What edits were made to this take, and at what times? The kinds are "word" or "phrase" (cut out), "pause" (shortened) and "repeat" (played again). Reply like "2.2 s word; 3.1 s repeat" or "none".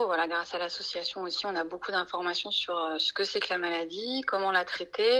none